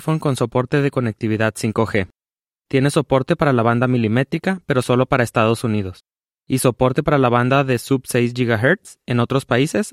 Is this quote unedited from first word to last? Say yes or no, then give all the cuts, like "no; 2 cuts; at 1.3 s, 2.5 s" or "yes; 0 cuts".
yes; 0 cuts